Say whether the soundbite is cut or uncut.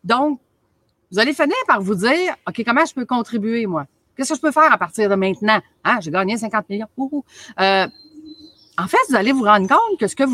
uncut